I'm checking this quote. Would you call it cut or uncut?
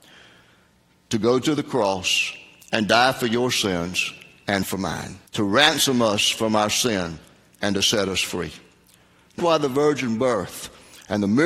cut